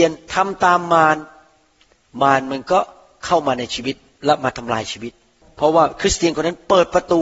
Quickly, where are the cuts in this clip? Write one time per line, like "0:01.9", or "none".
none